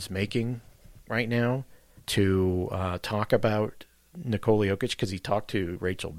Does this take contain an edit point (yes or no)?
no